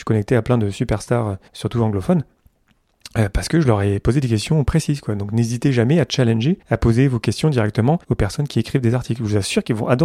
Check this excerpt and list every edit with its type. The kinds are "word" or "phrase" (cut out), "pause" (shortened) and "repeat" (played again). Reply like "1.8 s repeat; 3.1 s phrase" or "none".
1.5 s pause; 6.6 s pause; 8.0 s pause